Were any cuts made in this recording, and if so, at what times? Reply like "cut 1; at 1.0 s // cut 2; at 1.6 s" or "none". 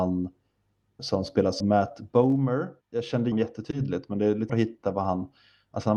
cut 1; at 1.0 s // cut 2; at 1.6 s // cut 3; at 2.8 s // cut 4; at 3.3 s // cut 5; at 4.5 s